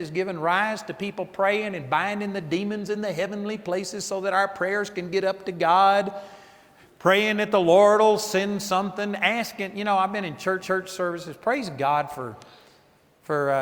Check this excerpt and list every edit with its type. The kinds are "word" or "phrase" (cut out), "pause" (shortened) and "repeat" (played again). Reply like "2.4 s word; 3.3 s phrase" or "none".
10.6 s repeat